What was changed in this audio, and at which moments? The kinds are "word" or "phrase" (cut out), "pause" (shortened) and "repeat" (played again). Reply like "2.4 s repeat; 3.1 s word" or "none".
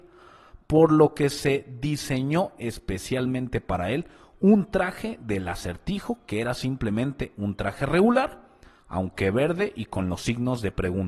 none